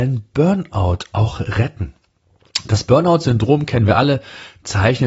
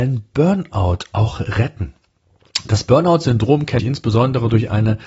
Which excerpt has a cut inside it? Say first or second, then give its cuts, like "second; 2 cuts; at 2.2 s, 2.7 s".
second; 1 cut; at 3.8 s